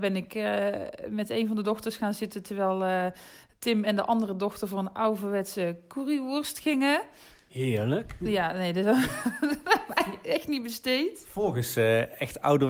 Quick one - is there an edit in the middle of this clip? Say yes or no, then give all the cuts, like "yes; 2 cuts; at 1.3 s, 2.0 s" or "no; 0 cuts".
no; 0 cuts